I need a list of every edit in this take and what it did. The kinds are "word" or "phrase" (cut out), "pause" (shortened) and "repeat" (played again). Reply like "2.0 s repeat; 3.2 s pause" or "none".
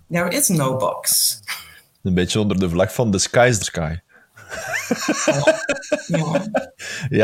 3.6 s phrase